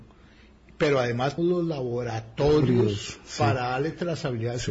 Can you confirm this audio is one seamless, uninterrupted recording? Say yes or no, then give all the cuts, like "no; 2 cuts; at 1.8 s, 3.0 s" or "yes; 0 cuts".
no; 1 cut; at 1.4 s